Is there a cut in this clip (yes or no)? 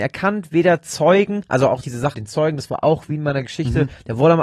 yes